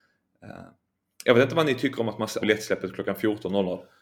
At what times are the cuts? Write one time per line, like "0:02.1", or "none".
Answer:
0:02.4